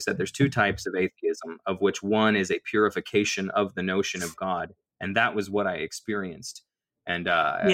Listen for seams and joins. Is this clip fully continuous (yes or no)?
yes